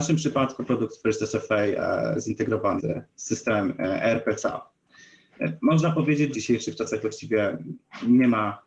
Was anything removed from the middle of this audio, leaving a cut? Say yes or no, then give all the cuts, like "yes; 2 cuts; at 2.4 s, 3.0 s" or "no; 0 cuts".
yes; 2 cuts; at 2.8 s, 6.3 s